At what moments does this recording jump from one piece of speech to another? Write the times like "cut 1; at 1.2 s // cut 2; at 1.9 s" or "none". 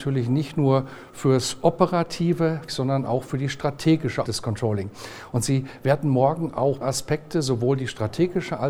cut 1; at 2.7 s // cut 2; at 4.2 s // cut 3; at 6.8 s